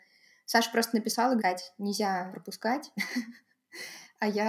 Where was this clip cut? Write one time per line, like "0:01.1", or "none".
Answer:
0:01.4
0:02.3